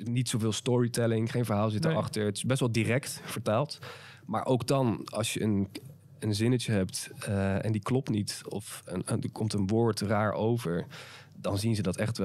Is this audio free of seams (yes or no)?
yes